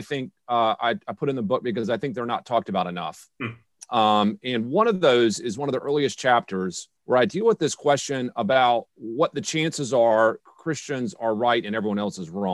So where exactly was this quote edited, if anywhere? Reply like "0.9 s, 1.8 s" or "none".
7.0 s, 8.9 s, 10.4 s